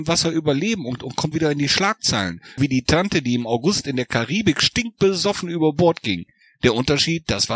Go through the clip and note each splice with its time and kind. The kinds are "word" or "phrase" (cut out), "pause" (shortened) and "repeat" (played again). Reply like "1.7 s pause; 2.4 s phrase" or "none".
1.0 s word; 1.3 s word; 2.6 s word